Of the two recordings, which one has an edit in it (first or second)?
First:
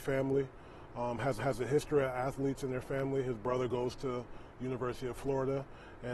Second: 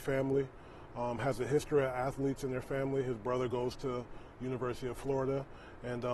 first